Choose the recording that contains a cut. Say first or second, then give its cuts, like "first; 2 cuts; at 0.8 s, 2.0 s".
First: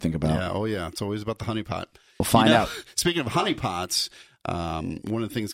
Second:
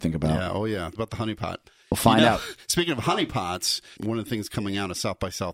second; 2 cuts; at 1.0 s, 4.0 s